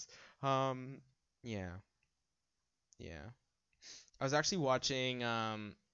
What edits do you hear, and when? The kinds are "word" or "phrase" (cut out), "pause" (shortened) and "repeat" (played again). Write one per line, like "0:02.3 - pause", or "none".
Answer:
0:01.1 - pause
0:04.1 - pause